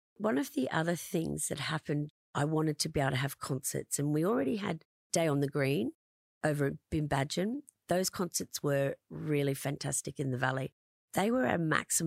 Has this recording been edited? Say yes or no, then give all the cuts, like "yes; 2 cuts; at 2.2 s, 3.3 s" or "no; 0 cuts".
no; 0 cuts